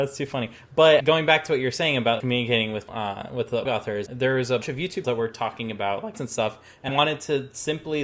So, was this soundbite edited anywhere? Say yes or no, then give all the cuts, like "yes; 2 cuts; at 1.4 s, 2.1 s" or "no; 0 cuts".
yes; 9 cuts; at 1.0 s, 2.2 s, 2.9 s, 3.6 s, 4.1 s, 4.6 s, 5.0 s, 6.1 s, 6.9 s